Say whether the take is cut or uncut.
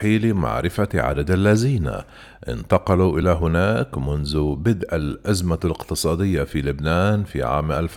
uncut